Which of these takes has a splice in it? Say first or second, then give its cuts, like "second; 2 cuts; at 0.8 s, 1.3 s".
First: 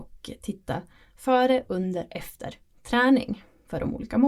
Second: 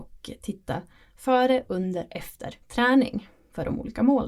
second; 1 cut; at 2.6 s